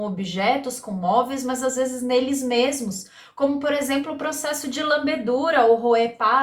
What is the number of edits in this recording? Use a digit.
0